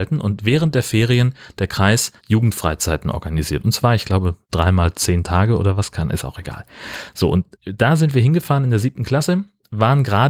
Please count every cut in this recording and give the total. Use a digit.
3